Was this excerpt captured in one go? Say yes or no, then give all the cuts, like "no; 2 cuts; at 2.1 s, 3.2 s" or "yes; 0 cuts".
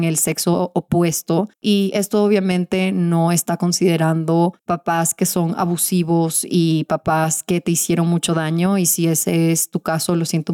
yes; 0 cuts